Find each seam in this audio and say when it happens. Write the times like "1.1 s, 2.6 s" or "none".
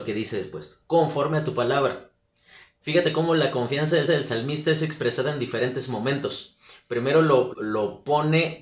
4.1 s, 7.5 s